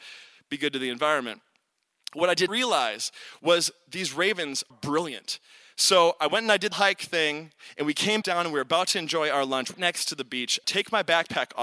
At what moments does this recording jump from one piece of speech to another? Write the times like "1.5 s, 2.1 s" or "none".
2.5 s, 4.7 s, 6.7 s, 8.2 s, 9.7 s, 10.6 s